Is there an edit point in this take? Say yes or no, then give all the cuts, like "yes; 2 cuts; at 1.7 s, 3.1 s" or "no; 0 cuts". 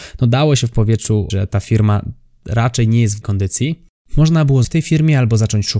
yes; 3 cuts; at 1.3 s, 3.2 s, 4.6 s